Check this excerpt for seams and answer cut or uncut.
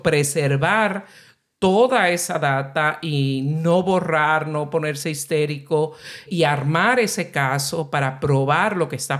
cut